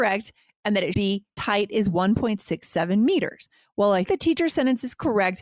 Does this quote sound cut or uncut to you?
cut